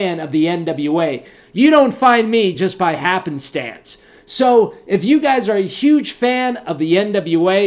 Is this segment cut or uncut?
uncut